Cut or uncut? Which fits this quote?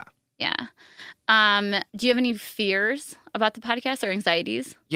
cut